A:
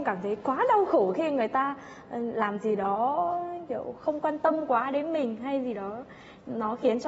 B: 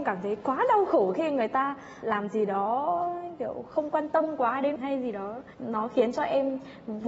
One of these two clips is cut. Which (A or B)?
B